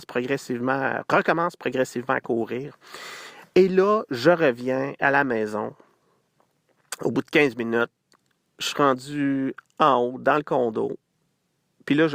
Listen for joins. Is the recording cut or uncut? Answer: uncut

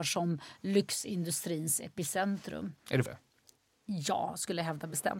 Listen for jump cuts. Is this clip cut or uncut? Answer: cut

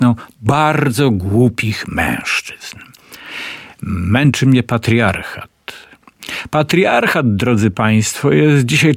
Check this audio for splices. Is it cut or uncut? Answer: uncut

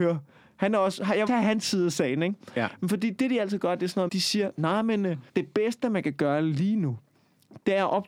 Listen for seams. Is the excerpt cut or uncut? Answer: cut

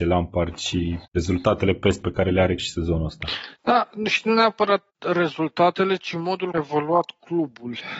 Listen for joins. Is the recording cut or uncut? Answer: cut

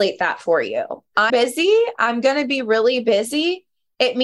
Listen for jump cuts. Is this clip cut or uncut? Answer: cut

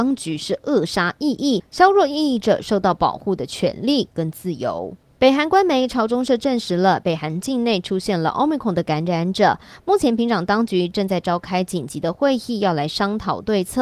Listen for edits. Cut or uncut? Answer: uncut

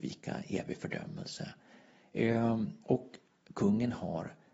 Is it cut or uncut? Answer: cut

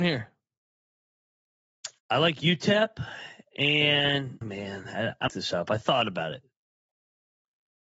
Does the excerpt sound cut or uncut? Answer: cut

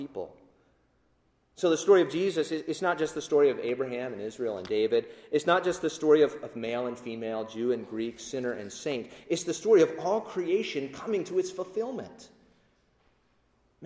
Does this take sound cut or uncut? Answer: uncut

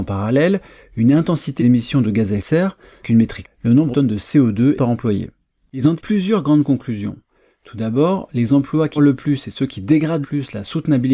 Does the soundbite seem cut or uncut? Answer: cut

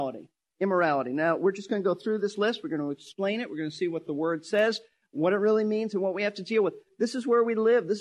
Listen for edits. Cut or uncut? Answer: uncut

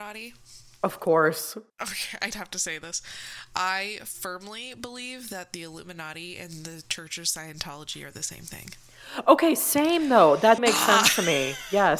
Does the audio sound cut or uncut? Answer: cut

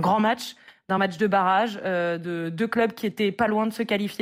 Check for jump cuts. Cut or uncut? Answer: uncut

